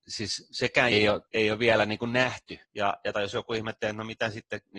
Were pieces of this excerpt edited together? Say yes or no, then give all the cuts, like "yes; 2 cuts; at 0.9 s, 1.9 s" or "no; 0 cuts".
yes; 4 cuts; at 0.9 s, 1.3 s, 2.6 s, 3.1 s